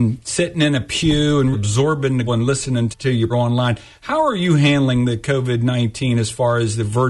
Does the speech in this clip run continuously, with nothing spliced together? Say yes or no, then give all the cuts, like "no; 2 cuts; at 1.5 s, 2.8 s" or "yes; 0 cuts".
no; 4 cuts; at 1.5 s, 2.3 s, 2.9 s, 3.3 s